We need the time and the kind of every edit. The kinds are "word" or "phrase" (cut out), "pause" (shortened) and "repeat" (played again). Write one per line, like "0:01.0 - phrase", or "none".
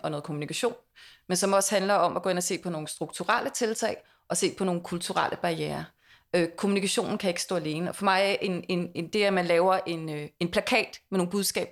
none